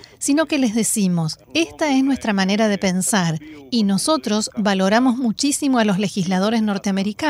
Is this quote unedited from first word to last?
no; 1 cut; at 1.4 s

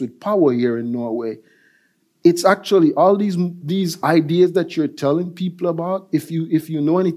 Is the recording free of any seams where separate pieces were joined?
yes; 0 cuts

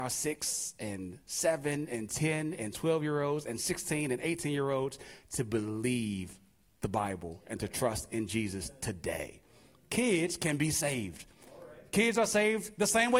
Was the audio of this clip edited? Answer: no; 0 cuts

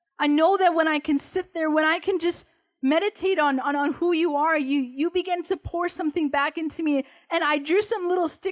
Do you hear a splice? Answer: no; 0 cuts

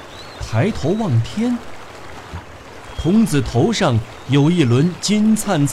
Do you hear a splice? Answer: yes; 1 cut; at 2.3 s

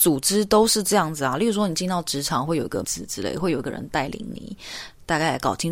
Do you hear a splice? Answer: yes; 1 cut; at 2.8 s

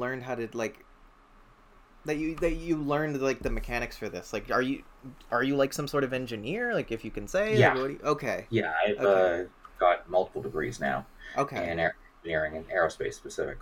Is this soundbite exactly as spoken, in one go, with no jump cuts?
yes; 0 cuts

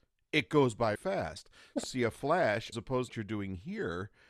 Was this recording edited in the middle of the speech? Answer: yes; 4 cuts; at 1.0 s, 1.8 s, 2.7 s, 3.1 s

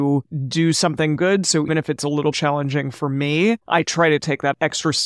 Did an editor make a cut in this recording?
yes; 4 cuts; at 1.2 s, 1.7 s, 2.3 s, 3.6 s

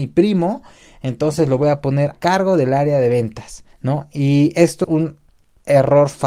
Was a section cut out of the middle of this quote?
yes; 3 cuts; at 2.1 s, 3.7 s, 4.8 s

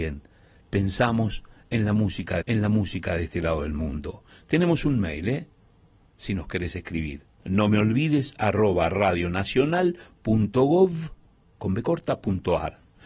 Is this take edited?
yes; 2 cuts; at 2.4 s, 7.3 s

